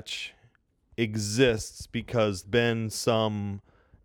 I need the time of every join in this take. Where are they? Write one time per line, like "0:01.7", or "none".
0:02.4

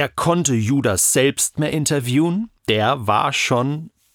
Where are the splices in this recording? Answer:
0:01.5
0:02.6

